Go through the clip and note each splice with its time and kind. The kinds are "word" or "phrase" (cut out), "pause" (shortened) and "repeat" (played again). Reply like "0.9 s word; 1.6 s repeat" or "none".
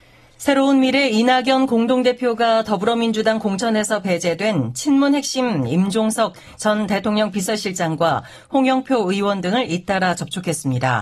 none